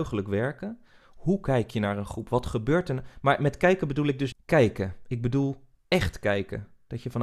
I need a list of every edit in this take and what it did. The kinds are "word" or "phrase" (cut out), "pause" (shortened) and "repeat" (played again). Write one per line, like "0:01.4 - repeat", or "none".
0:04.3 - word